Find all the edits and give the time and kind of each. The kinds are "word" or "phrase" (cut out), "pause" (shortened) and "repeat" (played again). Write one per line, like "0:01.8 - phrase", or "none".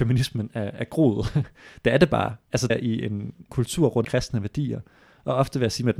0:02.7 - word
0:03.5 - word
0:04.0 - word